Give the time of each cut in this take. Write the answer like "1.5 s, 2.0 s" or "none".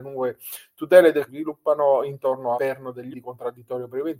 1.3 s, 2.5 s, 3.1 s